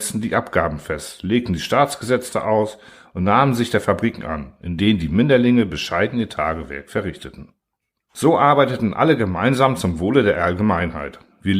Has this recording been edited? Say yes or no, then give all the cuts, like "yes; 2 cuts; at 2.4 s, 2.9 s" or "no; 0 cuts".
no; 0 cuts